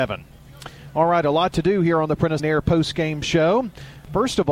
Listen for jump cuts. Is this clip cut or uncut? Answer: cut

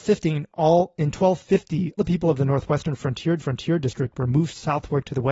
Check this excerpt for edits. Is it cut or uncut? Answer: cut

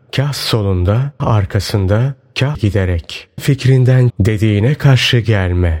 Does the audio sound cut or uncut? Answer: cut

